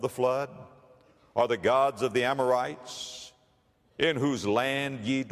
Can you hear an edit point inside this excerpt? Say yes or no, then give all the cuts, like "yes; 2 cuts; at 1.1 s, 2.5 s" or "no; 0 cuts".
no; 0 cuts